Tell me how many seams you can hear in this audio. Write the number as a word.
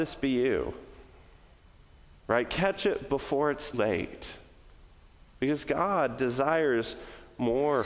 one